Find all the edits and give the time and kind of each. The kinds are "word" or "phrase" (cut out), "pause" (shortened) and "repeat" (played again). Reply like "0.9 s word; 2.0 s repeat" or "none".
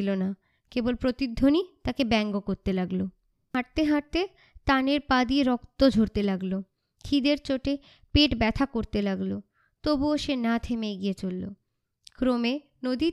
none